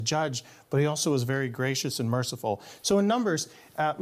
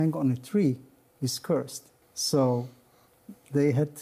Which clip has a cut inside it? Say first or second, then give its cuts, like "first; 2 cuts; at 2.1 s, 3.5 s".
second; 1 cut; at 2.0 s